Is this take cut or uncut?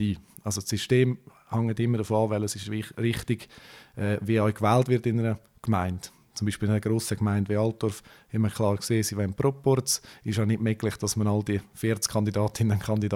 uncut